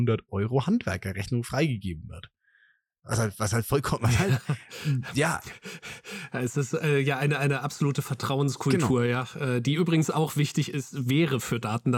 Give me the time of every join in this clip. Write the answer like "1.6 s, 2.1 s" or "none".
none